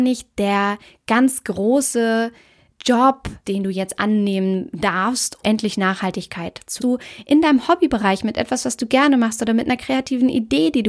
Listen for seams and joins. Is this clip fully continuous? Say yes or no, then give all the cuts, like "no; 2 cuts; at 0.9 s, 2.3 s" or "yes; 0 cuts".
no; 3 cuts; at 3.4 s, 5.4 s, 6.8 s